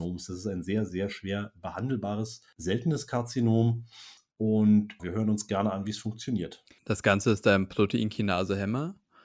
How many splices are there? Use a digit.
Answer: 1